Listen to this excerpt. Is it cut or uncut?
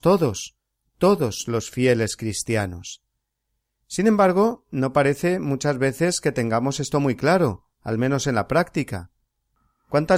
uncut